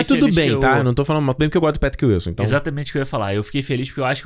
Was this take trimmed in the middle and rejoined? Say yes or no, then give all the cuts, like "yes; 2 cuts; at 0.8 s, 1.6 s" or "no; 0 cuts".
yes; 1 cut; at 1.4 s